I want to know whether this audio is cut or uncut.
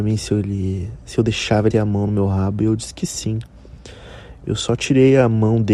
cut